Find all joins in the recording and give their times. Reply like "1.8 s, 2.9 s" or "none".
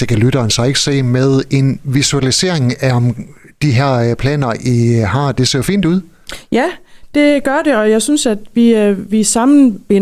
none